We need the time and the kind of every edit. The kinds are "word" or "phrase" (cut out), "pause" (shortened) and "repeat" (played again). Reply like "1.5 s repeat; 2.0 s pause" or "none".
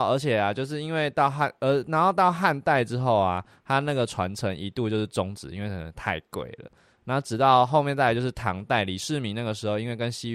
none